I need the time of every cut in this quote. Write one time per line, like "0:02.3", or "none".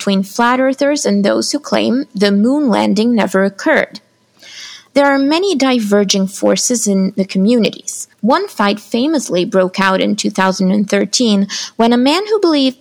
0:08.1

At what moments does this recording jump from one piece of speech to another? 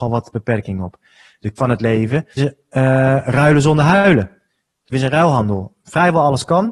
0:01.6
0:02.4
0:04.9

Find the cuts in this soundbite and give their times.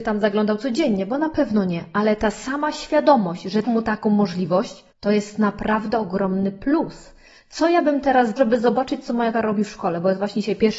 0:03.6
0:04.9
0:08.4
0:09.3

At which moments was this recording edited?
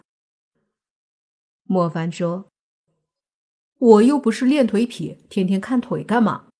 0:05.2

